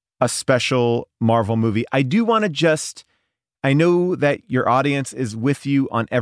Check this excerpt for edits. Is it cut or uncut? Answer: uncut